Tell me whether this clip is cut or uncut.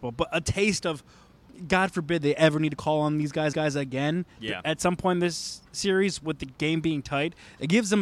cut